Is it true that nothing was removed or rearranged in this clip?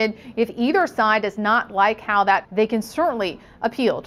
no; 1 cut; at 2.4 s

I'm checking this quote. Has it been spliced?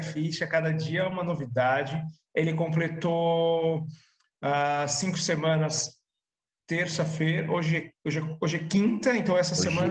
no; 0 cuts

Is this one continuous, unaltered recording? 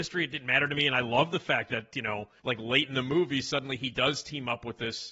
no; 1 cut; at 2.4 s

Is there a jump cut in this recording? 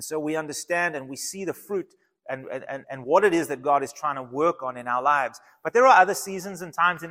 yes; 1 cut; at 2.8 s

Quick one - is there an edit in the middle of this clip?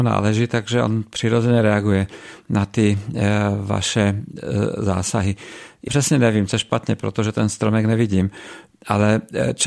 yes; 2 cuts; at 5.9 s, 6.5 s

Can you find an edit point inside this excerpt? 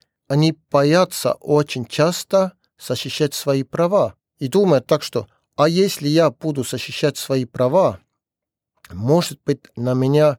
no; 0 cuts

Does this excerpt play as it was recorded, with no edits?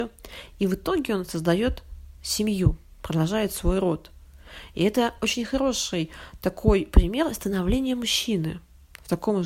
yes; 0 cuts

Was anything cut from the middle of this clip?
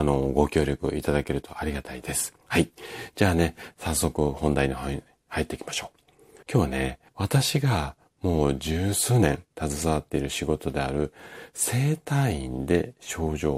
yes; 3 cuts; at 2.4 s, 6.4 s, 7.1 s

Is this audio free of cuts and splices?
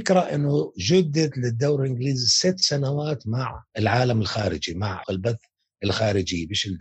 no; 2 cuts; at 3.7 s, 5.0 s

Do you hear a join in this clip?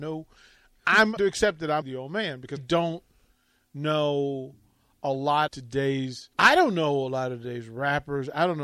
yes; 5 cuts; at 1.2 s, 1.8 s, 2.6 s, 5.5 s, 6.3 s

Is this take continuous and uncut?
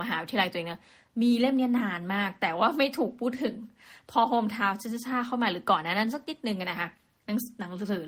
yes; 0 cuts

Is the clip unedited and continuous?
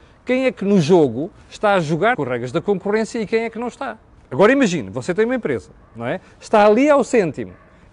no; 2 cuts; at 2.1 s, 4.2 s

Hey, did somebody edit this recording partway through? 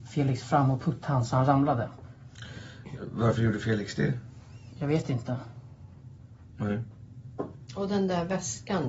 no; 0 cuts

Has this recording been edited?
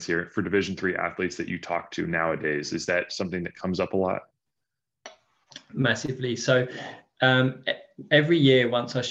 no; 0 cuts

